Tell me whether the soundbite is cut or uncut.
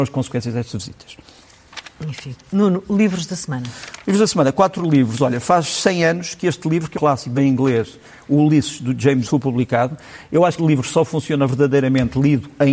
cut